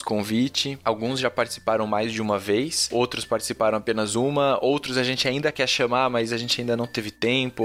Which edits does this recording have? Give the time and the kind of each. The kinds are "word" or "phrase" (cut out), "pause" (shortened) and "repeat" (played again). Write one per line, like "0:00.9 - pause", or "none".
none